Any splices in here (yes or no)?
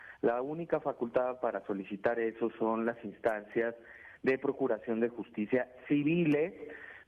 no